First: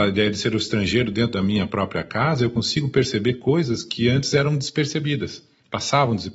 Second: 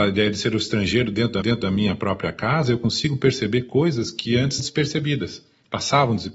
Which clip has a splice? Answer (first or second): second